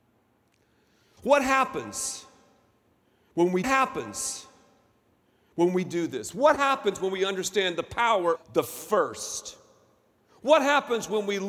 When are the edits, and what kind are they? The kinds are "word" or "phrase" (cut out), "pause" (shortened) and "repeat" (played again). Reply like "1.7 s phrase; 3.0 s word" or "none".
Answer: 3.6 s repeat; 8.4 s word